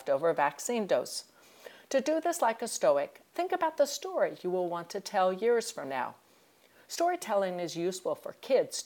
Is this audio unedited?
yes; 0 cuts

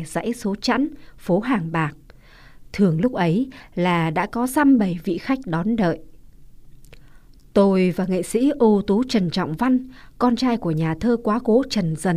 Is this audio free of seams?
yes; 0 cuts

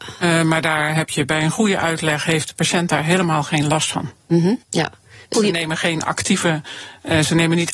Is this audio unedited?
no; 2 cuts; at 4.6 s, 5.3 s

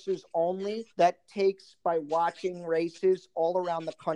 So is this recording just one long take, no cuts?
no; 1 cut; at 0.9 s

